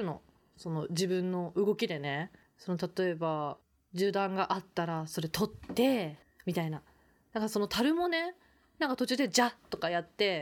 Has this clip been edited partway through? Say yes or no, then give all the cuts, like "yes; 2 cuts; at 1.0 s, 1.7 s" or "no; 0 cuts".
no; 0 cuts